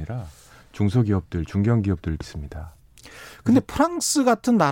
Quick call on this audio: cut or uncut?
cut